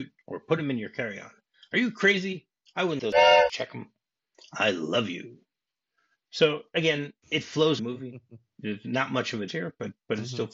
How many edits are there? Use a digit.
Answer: 4